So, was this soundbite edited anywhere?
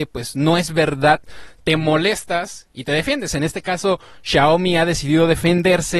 no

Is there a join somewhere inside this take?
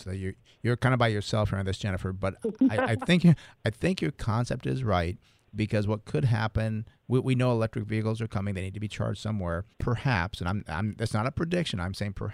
yes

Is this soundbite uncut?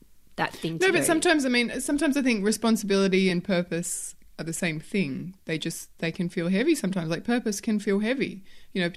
yes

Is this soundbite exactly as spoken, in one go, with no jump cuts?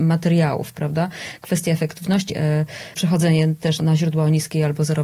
no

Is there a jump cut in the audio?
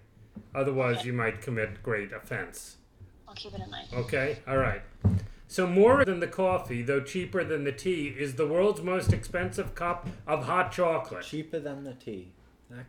yes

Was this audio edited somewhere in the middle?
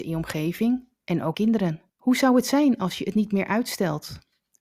yes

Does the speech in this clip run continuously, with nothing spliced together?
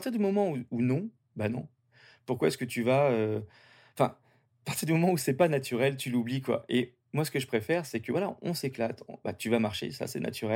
yes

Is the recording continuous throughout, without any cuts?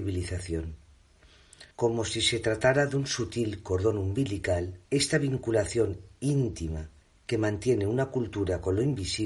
no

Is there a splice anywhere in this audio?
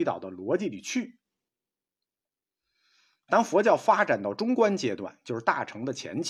no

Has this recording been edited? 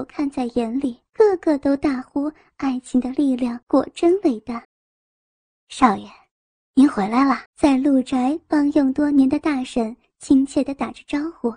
yes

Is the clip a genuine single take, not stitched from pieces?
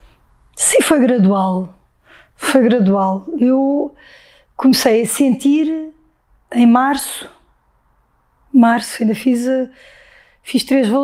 yes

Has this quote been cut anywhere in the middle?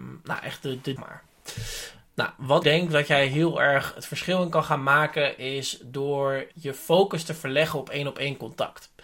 yes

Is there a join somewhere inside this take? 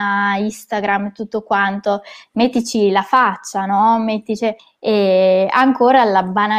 yes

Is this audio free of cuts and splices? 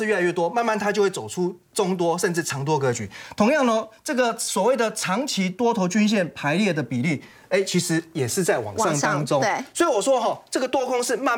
yes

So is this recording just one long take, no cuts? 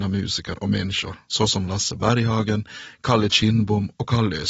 yes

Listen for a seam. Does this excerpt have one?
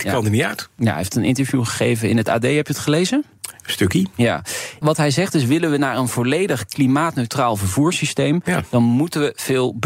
no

